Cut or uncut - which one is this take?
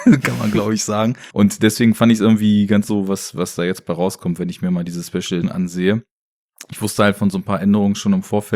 cut